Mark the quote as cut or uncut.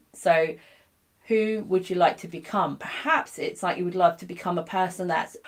uncut